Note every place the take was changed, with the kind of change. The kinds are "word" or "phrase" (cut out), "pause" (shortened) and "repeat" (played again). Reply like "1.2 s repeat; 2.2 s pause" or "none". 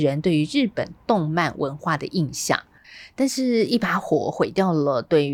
none